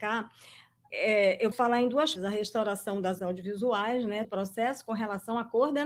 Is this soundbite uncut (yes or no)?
no